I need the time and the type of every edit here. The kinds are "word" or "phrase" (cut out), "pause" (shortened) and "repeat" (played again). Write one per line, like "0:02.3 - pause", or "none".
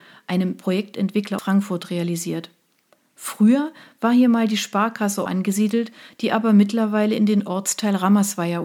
0:01.4 - word
0:05.3 - word